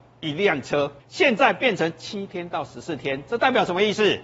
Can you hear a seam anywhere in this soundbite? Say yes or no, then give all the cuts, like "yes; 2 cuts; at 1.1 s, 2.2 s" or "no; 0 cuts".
yes; 1 cut; at 1.0 s